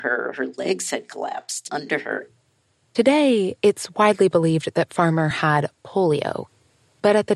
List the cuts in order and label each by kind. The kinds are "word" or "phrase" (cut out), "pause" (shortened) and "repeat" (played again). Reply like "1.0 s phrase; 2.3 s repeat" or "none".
none